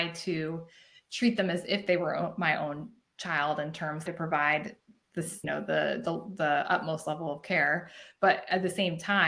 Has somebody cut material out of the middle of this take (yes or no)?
yes